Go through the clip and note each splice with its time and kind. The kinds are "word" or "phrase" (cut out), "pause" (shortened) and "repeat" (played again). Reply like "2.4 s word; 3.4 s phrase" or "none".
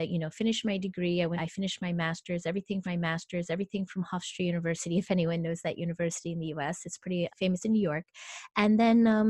1.4 s phrase; 2.8 s repeat; 7.3 s word